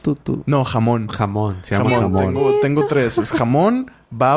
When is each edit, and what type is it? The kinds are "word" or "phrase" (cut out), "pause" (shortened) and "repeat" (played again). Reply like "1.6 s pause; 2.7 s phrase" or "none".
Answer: none